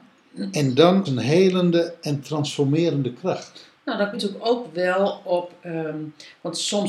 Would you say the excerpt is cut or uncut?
cut